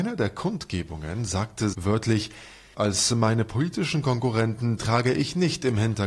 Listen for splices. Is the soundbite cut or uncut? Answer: cut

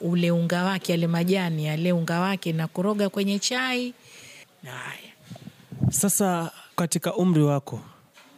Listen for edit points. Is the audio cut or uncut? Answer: cut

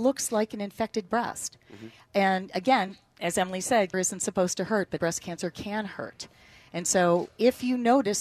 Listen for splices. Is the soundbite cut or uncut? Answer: cut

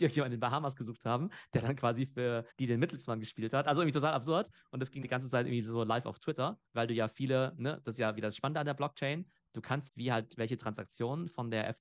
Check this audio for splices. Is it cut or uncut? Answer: cut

